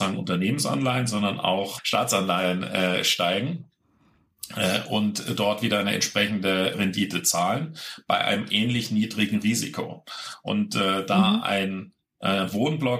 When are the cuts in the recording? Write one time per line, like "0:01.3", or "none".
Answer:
0:06.7